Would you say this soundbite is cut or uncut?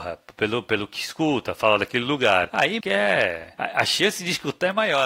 cut